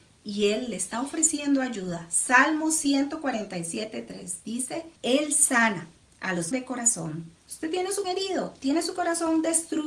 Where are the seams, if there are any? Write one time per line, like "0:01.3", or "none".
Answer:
0:05.0
0:06.5
0:07.4
0:08.0